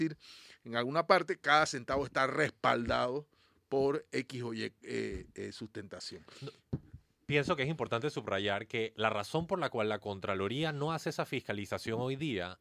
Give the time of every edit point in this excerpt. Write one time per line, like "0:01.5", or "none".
none